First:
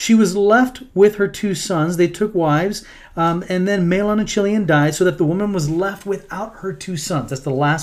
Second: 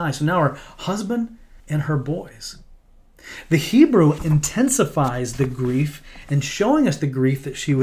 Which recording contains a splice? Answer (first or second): second